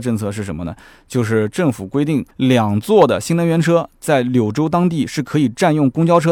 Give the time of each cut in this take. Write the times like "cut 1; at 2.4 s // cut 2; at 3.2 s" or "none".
cut 1; at 2.3 s